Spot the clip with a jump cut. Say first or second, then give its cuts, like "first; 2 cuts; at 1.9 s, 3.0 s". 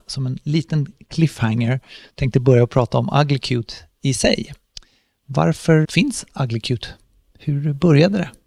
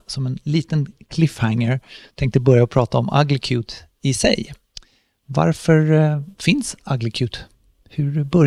first; 1 cut; at 5.8 s